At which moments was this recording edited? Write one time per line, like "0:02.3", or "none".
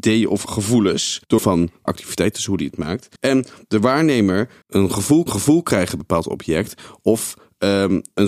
0:01.4
0:01.9
0:03.2
0:04.6
0:05.3
0:06.0